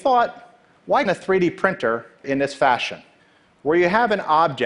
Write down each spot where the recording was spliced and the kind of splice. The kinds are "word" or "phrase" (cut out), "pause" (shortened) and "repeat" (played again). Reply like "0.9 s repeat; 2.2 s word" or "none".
1.1 s word; 2.2 s word; 3.2 s pause